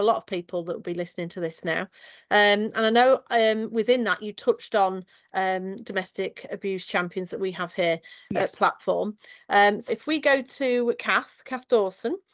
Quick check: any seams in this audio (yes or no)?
yes